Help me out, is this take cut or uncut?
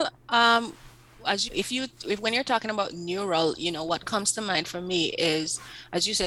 cut